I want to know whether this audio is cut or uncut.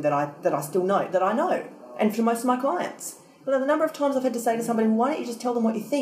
uncut